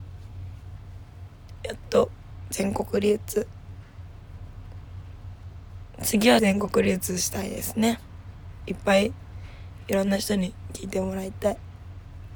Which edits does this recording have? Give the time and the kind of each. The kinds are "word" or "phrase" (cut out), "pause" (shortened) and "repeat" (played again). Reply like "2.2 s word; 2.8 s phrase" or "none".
6.4 s word